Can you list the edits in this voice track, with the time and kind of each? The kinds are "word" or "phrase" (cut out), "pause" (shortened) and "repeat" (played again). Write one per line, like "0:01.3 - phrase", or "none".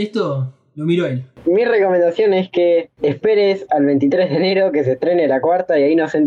none